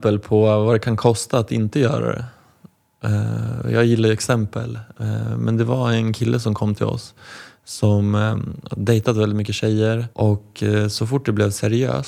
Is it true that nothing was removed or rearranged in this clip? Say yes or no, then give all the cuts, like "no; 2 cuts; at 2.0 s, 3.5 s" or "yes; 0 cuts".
no; 1 cut; at 10.1 s